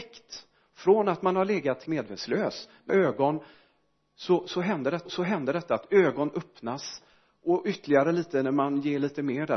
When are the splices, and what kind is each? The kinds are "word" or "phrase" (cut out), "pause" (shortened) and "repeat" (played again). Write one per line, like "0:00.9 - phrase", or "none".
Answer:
0:01.9 - word
0:02.9 - word
0:05.1 - repeat

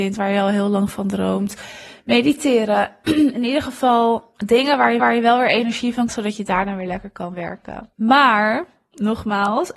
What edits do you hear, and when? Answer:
0:04.4 - pause
0:05.0 - repeat
0:06.1 - word
0:07.9 - pause

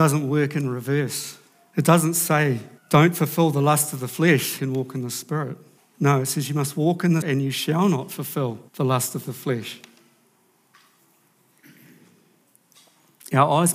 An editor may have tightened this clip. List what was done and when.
0:01.5 - pause
0:02.8 - pause
0:04.6 - phrase
0:05.8 - pause
0:07.2 - word
0:08.7 - pause

